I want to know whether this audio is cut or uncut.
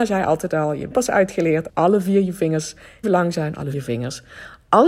cut